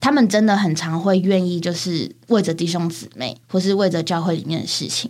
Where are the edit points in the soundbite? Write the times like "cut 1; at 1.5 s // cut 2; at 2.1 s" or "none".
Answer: cut 1; at 3.4 s